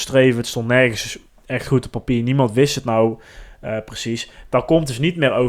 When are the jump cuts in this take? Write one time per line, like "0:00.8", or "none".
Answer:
none